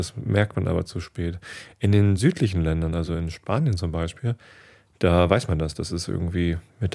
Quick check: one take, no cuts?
yes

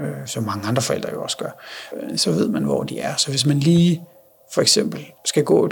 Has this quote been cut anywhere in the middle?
no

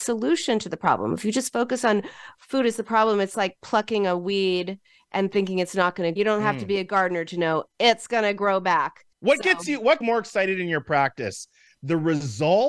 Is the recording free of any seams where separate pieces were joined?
no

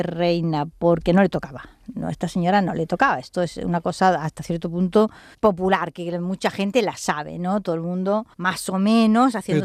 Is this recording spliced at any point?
yes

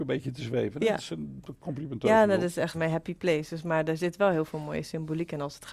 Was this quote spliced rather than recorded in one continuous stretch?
yes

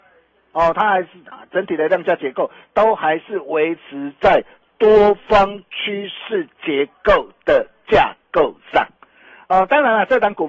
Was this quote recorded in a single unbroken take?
yes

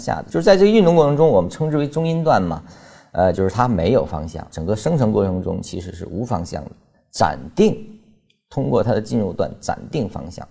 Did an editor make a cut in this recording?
no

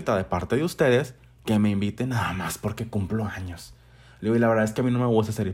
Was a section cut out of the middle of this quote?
no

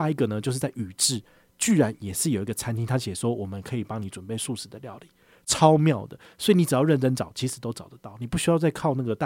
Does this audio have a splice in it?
no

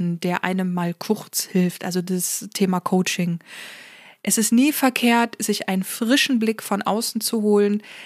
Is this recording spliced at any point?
no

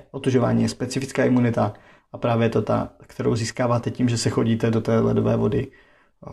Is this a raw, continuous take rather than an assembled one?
yes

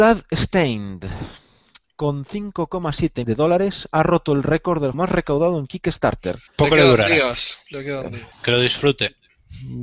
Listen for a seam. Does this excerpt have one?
yes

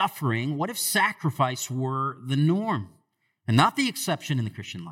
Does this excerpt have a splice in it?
no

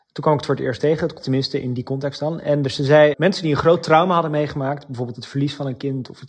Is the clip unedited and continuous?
no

